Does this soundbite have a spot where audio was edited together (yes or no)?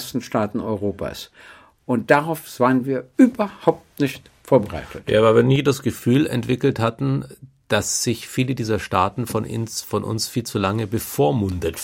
no